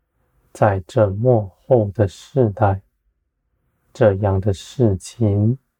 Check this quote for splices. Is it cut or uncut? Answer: uncut